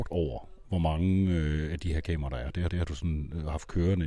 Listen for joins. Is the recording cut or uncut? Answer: cut